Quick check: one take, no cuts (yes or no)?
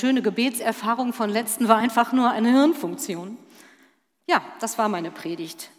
yes